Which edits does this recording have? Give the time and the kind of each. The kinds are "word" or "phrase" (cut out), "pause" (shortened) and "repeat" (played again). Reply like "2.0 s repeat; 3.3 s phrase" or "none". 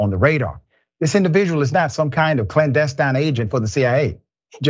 none